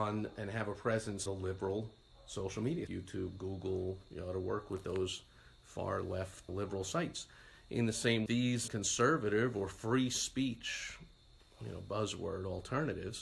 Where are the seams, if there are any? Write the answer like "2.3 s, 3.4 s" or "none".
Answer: 1.3 s, 2.9 s, 6.5 s, 8.3 s, 8.7 s